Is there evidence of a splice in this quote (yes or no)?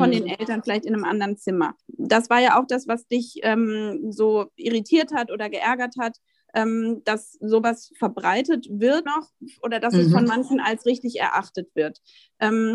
yes